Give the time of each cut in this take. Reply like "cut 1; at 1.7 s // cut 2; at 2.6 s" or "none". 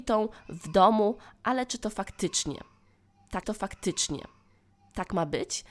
cut 1; at 3.4 s